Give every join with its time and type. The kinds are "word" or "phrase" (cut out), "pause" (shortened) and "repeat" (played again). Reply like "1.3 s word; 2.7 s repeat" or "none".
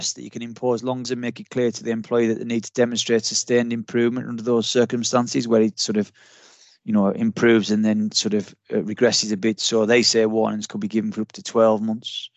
1.0 s word